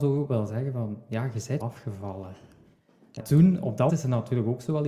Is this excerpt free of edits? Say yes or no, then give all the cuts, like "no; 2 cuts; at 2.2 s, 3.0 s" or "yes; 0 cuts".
no; 3 cuts; at 1.6 s, 3.2 s, 3.9 s